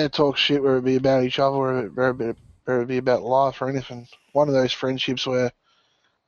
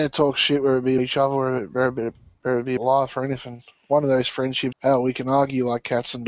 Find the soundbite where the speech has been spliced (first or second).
second